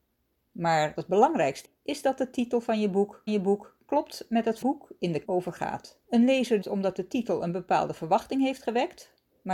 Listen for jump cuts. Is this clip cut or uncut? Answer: cut